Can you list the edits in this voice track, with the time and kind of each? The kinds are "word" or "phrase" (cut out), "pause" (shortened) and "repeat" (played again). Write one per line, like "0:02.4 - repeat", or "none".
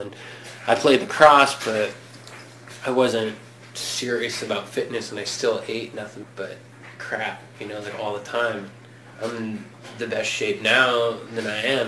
0:06.2 - word
0:09.1 - pause